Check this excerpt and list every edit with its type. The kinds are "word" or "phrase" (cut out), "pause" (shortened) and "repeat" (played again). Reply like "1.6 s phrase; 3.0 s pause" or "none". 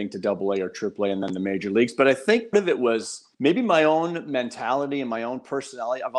2.5 s word; 3.3 s pause